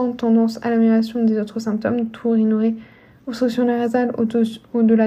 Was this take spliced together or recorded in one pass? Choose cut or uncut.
uncut